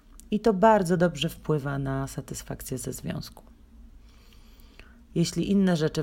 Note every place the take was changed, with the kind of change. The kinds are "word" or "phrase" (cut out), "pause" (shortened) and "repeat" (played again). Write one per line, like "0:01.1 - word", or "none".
none